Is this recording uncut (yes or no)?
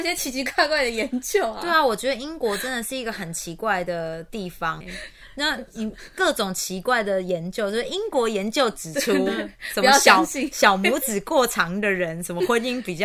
no